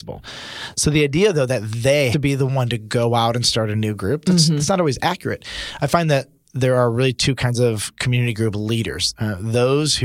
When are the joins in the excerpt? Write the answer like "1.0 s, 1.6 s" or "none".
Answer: 2.1 s